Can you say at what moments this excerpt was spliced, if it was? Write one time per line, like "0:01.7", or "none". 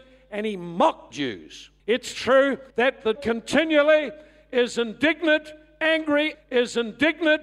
0:01.1
0:01.8
0:02.7
0:03.2
0:06.3